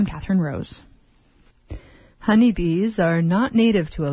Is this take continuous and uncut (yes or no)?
yes